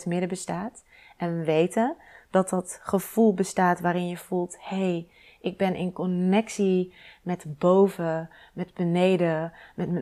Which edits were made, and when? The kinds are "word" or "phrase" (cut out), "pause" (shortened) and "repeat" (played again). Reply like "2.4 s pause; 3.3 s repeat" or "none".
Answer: none